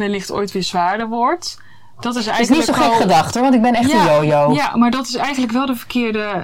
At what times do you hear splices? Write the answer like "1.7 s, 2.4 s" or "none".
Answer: none